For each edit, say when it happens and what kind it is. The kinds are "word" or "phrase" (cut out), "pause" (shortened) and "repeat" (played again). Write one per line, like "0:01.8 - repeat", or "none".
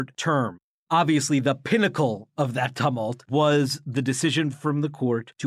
none